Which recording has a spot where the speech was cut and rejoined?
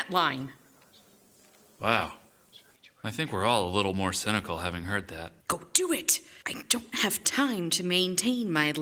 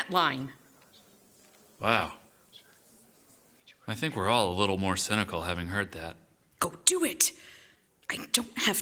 first; 3 cuts; at 2.7 s, 5.4 s, 6.4 s

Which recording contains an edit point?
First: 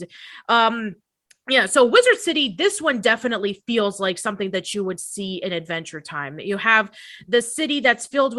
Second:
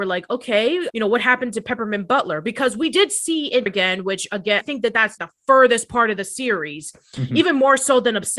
second; 4 cuts; at 0.9 s, 3.7 s, 4.6 s, 5.2 s

